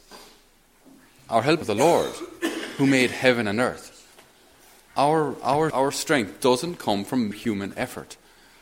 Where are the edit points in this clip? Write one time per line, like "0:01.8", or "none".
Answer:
0:01.6
0:05.7
0:07.3